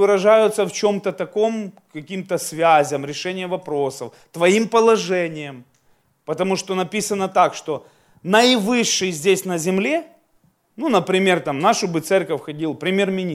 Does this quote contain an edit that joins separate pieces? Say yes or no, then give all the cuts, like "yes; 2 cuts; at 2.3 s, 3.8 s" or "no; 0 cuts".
no; 0 cuts